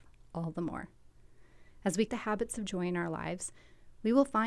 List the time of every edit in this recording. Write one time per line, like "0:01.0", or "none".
0:02.1